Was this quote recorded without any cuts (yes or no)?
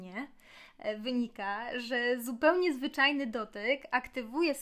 yes